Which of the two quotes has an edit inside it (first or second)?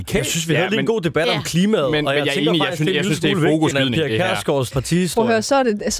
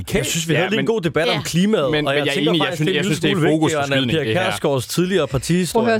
first